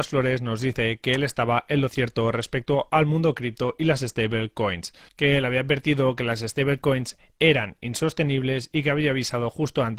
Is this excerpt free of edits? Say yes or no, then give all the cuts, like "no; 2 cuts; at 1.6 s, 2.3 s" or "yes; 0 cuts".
yes; 0 cuts